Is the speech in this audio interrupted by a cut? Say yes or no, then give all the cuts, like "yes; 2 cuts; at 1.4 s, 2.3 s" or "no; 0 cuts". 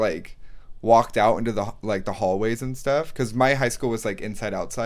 no; 0 cuts